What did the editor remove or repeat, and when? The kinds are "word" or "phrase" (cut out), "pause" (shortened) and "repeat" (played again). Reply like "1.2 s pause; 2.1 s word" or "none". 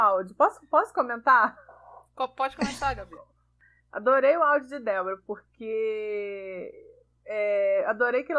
none